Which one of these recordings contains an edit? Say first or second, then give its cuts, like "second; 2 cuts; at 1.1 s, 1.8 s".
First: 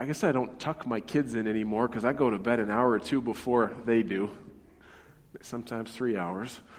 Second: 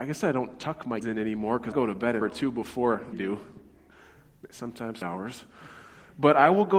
second; 5 cuts; at 1.0 s, 1.7 s, 2.2 s, 3.1 s, 5.0 s